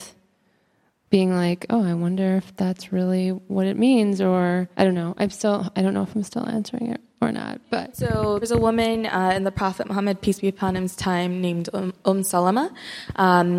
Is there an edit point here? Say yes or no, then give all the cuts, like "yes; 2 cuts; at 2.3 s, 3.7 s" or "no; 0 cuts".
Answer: yes; 3 cuts; at 4.7 s, 7.1 s, 8.4 s